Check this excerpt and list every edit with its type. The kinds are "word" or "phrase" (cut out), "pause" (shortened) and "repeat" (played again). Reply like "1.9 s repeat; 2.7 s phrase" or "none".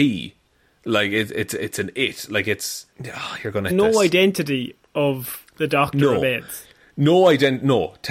2.9 s pause; 3.7 s word